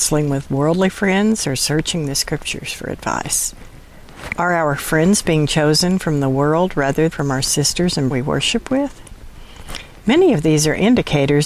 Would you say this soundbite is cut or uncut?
cut